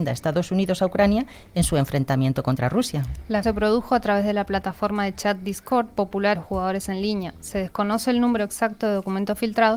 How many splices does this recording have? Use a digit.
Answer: 2